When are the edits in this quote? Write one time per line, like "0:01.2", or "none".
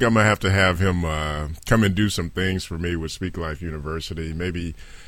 none